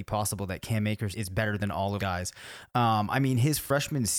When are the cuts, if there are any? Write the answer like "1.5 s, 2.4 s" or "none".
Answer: 1.1 s, 2.0 s